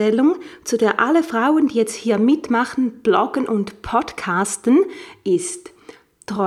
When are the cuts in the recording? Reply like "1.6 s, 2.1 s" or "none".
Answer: none